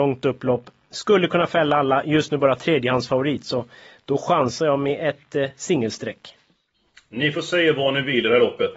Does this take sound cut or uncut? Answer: uncut